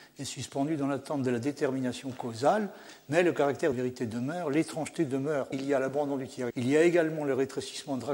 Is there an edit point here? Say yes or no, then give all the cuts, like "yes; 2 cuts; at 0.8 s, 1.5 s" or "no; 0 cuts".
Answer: yes; 3 cuts; at 3.7 s, 5.5 s, 6.5 s